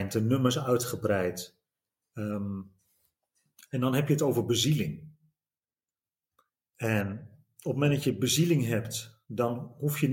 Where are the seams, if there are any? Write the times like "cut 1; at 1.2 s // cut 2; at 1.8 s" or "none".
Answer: none